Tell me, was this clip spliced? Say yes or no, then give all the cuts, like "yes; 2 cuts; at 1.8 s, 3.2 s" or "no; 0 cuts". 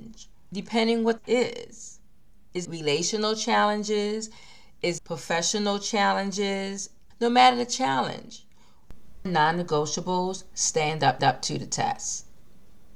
yes; 5 cuts; at 1.2 s, 2.6 s, 5.0 s, 9.3 s, 11.2 s